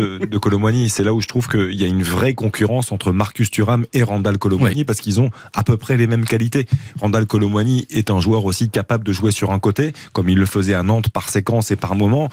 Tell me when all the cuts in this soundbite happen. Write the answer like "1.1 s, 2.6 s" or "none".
none